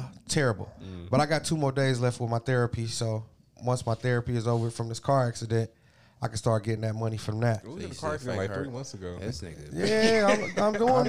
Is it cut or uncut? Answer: uncut